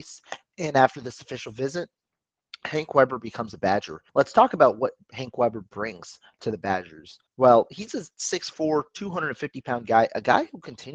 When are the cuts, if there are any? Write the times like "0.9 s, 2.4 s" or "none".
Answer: 4.1 s, 7.3 s